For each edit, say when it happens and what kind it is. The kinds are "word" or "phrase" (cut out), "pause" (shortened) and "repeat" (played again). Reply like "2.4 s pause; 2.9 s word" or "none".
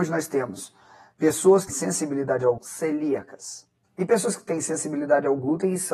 1.7 s word; 2.6 s phrase; 3.8 s pause